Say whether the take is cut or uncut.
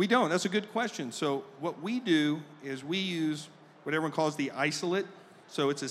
uncut